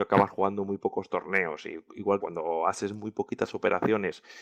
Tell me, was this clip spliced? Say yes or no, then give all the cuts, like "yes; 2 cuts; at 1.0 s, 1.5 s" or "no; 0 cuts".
yes; 1 cut; at 2.2 s